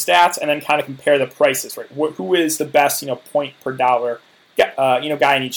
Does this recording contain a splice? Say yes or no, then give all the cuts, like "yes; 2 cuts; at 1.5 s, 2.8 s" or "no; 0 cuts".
no; 0 cuts